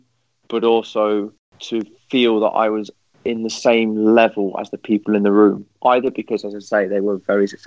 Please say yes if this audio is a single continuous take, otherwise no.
yes